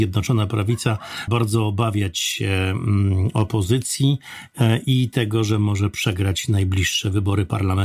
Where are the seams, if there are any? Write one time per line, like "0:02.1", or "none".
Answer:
0:01.3